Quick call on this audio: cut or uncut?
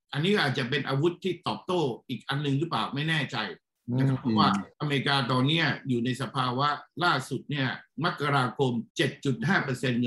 cut